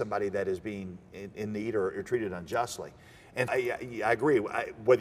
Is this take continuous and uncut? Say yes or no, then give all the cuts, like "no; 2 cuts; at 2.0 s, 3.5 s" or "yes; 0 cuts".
no; 1 cut; at 3.5 s